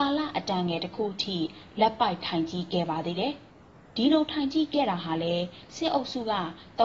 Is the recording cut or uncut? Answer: cut